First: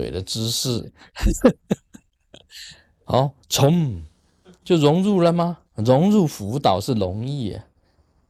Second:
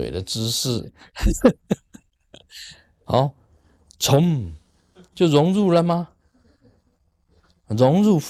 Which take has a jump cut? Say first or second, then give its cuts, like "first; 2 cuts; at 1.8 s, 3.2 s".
first; 2 cuts; at 3.4 s, 5.7 s